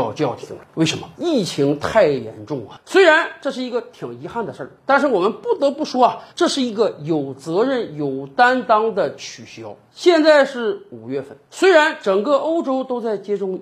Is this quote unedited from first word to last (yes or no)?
no